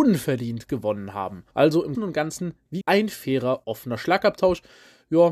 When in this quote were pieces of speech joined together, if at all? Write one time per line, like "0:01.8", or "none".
0:01.5
0:01.9
0:02.8
0:03.6